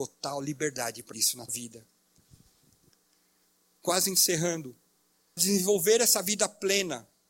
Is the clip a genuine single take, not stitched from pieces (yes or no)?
no